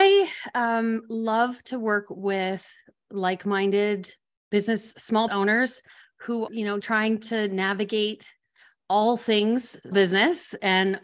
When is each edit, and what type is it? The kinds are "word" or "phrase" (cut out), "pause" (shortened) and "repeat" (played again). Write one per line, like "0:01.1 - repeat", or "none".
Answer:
0:05.3 - word
0:06.5 - word
0:06.8 - word
0:09.9 - word